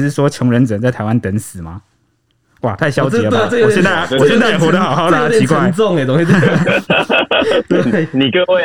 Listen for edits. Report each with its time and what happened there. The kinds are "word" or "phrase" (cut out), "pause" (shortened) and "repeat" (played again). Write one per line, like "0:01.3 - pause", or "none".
none

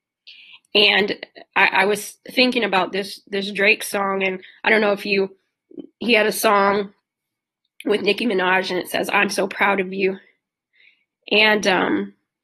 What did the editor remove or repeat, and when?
none

